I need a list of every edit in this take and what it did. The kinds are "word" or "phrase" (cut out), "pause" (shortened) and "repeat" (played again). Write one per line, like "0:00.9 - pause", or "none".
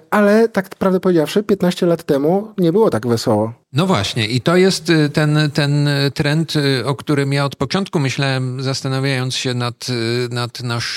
0:03.6 - pause